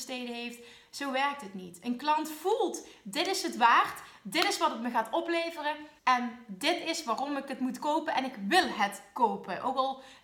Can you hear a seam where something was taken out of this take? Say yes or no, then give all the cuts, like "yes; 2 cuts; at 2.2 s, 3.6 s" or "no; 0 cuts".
yes; 1 cut; at 6.0 s